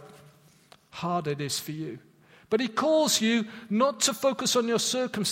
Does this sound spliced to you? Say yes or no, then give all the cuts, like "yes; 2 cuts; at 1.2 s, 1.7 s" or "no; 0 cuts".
no; 0 cuts